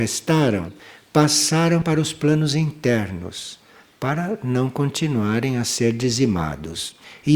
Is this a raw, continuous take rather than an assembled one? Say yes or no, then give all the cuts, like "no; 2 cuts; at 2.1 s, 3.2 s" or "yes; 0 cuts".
yes; 0 cuts